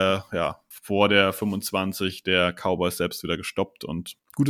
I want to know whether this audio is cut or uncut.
uncut